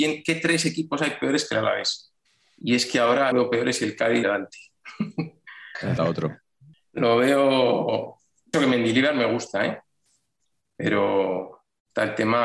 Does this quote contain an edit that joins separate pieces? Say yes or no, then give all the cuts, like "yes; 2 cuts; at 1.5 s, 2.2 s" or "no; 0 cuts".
yes; 4 cuts; at 3.3 s, 4.2 s, 6.0 s, 8.5 s